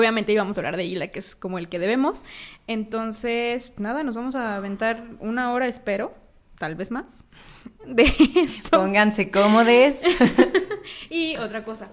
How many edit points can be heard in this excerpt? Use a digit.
1